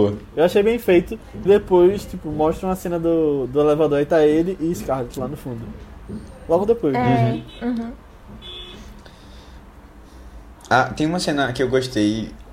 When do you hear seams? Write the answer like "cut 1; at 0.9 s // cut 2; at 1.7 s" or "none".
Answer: cut 1; at 1.5 s